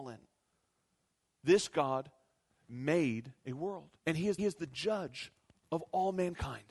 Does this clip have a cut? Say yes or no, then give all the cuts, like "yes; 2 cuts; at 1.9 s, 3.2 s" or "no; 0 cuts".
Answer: yes; 3 cuts; at 3.4 s, 4.0 s, 4.4 s